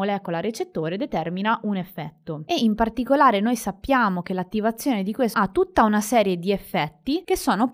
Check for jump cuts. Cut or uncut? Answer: cut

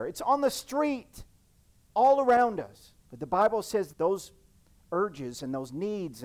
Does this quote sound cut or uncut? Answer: cut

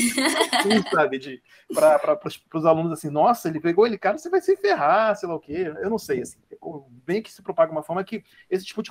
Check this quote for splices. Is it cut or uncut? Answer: uncut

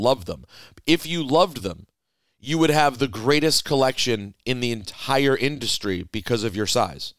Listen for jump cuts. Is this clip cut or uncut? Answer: uncut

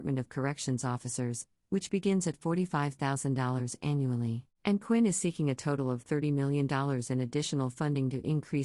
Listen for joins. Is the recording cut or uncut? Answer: cut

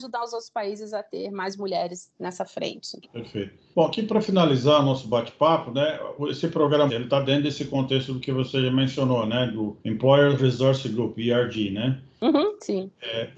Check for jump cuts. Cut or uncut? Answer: cut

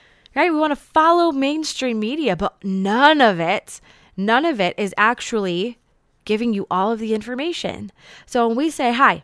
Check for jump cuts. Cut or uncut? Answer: uncut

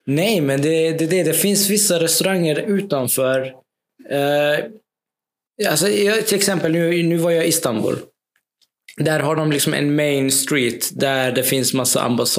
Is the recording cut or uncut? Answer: uncut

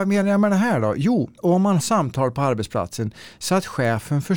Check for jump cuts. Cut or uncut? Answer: cut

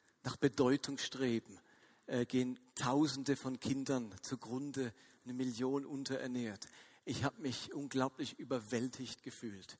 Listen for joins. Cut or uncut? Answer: uncut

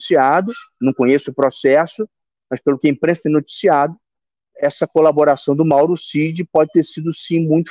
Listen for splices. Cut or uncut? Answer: uncut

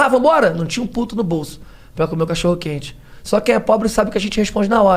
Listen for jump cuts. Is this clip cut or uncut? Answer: uncut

